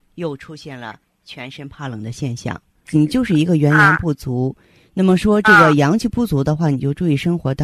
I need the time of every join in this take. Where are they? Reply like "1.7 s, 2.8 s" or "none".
none

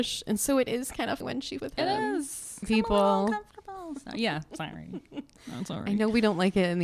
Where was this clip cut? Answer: 1.2 s, 1.6 s, 2.6 s

